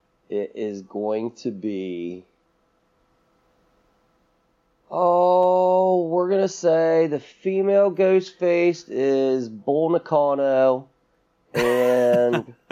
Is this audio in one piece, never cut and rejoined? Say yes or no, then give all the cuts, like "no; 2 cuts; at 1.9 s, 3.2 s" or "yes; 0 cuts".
yes; 0 cuts